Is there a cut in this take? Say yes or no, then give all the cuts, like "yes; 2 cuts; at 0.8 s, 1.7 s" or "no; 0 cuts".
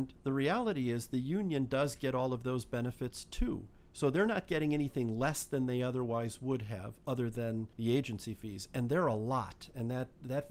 yes; 2 cuts; at 3.8 s, 7.7 s